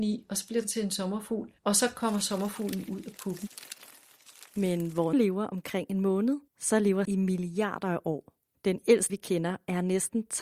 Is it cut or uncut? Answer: cut